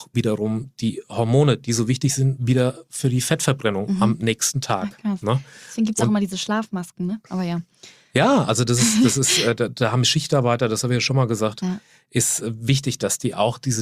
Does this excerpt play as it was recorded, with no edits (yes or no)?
yes